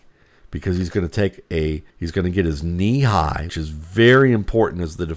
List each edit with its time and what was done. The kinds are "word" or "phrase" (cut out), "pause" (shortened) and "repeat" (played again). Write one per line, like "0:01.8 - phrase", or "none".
0:01.9 - pause
0:03.5 - word